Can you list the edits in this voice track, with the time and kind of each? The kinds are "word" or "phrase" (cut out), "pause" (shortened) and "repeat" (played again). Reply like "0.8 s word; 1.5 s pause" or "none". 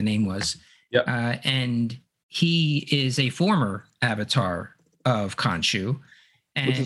none